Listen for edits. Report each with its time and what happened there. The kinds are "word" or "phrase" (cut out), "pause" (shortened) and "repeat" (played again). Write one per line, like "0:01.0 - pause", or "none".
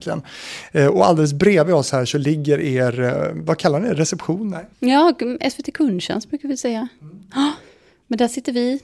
0:04.7 - pause

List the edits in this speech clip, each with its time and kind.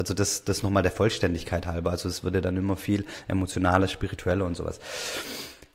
none

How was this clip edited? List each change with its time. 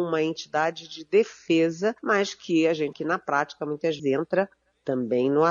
0:02.0 - pause
0:02.9 - word
0:04.0 - word

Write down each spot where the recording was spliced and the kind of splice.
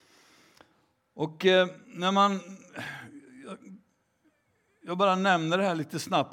0:01.8 - pause

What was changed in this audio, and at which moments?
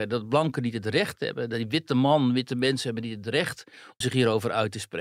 0:04.0 - word

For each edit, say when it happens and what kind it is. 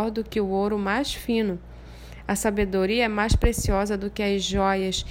none

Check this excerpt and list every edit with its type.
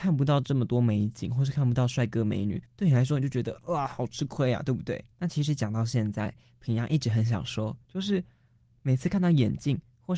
0:02.7 - pause
0:05.1 - pause

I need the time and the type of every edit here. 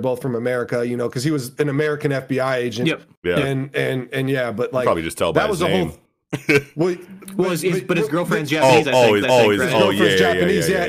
0:09.2 - repeat

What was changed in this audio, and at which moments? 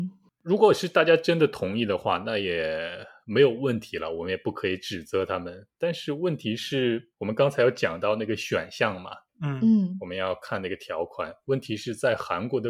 0:07.1 - pause

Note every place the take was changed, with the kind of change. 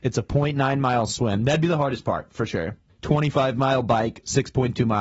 0:02.9 - pause

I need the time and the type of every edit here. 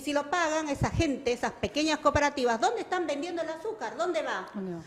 none

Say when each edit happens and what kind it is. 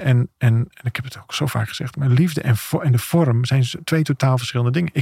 none

